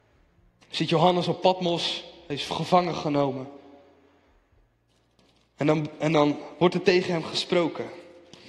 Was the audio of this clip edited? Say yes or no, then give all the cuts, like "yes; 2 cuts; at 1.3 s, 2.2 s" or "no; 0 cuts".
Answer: no; 0 cuts